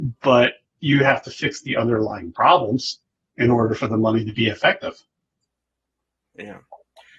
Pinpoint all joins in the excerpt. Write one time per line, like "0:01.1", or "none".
none